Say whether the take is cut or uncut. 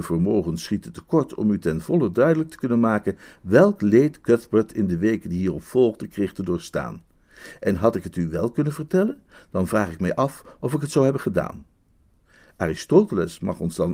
uncut